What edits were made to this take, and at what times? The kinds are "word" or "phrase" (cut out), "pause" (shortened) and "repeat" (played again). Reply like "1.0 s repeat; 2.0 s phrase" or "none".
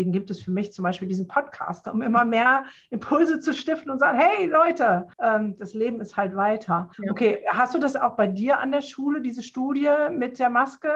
5.1 s pause; 6.9 s pause